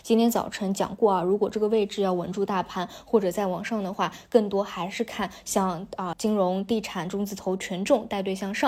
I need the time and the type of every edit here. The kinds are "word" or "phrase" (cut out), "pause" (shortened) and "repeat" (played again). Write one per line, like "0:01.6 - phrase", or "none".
0:06.1 - word